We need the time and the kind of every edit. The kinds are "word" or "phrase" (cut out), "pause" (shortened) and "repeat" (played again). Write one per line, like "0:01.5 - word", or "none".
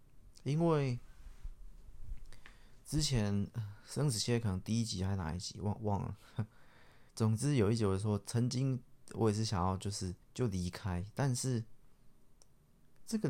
0:07.1 - pause
0:10.2 - pause